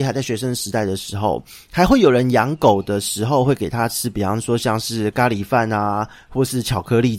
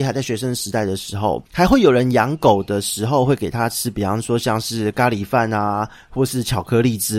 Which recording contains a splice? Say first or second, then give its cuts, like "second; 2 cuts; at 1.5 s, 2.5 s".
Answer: second; 1 cut; at 1.5 s